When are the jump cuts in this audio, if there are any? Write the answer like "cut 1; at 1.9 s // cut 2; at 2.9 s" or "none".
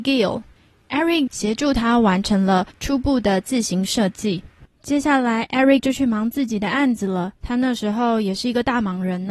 cut 1; at 1.3 s // cut 2; at 2.7 s // cut 3; at 5.8 s // cut 4; at 7.4 s

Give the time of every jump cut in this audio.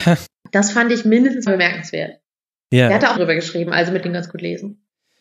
cut 1; at 1.5 s // cut 2; at 3.2 s // cut 3; at 4.0 s

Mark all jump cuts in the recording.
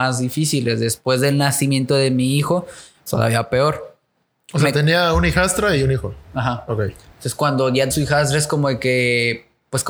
cut 1; at 3.1 s // cut 2; at 7.9 s

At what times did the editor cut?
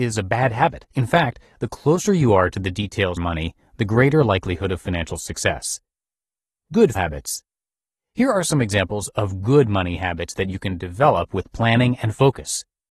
cut 1; at 0.9 s // cut 2; at 3.2 s // cut 3; at 6.9 s

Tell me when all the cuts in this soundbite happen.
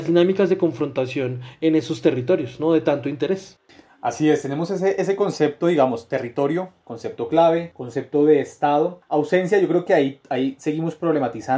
none

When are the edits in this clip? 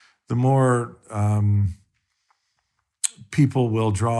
none

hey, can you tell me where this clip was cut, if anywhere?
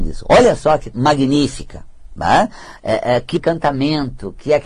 cut 1; at 0.9 s // cut 2; at 2.8 s // cut 3; at 3.4 s

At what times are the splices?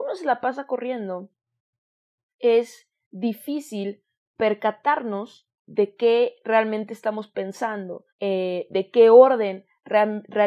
cut 1; at 5.6 s // cut 2; at 8.1 s

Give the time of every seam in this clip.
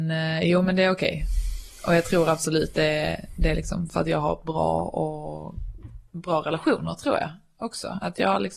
cut 1; at 6.1 s

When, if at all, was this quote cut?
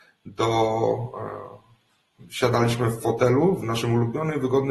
none

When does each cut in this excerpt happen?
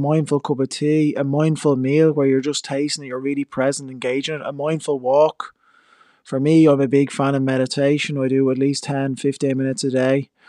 none

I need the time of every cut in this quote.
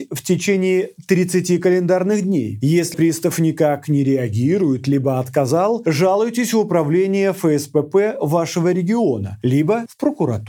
cut 1; at 2.9 s

